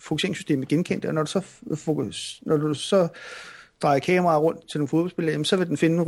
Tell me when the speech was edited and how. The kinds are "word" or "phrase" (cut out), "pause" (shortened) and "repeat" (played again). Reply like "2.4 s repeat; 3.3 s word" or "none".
4.6 s word